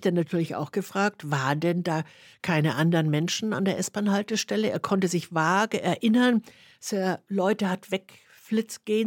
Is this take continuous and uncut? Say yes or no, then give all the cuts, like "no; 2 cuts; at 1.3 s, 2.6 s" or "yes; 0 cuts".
yes; 0 cuts